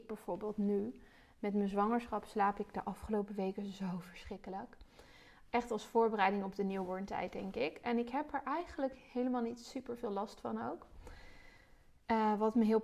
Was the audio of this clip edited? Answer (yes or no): no